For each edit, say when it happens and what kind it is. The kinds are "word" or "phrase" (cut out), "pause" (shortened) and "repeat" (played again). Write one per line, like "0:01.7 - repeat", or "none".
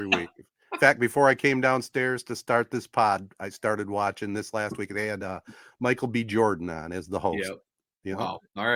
none